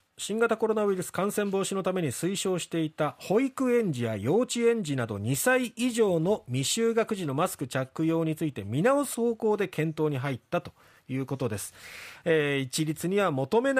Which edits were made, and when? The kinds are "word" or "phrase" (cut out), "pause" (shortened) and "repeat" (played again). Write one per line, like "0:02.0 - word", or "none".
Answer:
none